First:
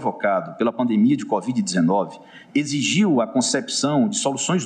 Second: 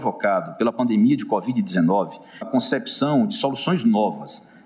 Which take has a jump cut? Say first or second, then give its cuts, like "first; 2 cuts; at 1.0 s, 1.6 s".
second; 1 cut; at 2.4 s